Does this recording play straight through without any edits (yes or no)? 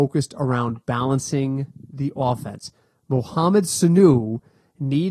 yes